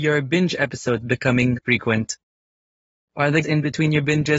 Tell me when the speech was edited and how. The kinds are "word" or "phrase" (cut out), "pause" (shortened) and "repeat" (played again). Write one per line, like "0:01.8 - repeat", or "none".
0:01.6 - word
0:03.4 - word